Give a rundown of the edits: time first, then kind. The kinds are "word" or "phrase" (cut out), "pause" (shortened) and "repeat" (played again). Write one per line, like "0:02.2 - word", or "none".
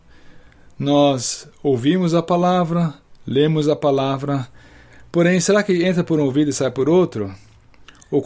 none